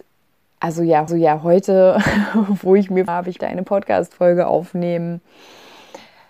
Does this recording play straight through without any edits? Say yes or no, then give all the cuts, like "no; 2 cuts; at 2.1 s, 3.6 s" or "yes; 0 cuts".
no; 3 cuts; at 1.1 s, 3.1 s, 3.4 s